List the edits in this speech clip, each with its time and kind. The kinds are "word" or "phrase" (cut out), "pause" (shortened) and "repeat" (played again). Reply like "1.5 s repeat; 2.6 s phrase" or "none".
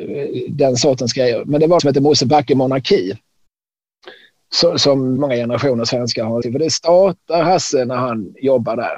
1.8 s word; 5.2 s word; 6.4 s word